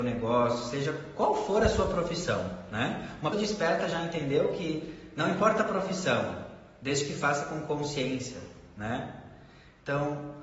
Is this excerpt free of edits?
no; 1 cut; at 3.3 s

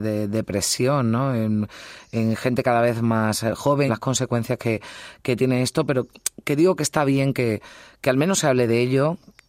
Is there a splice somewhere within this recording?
yes; 1 cut; at 3.9 s

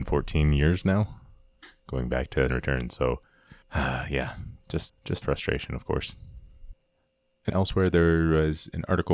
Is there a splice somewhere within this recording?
yes; 5 cuts; at 2.5 s, 3.6 s, 4.9 s, 5.2 s, 7.5 s

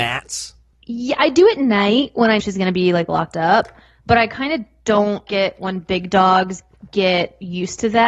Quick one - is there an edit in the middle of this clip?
yes; 2 cuts; at 2.4 s, 5.3 s

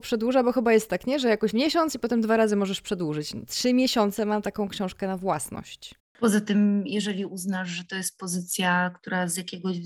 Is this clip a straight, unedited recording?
no; 2 cuts; at 1.5 s, 6.0 s

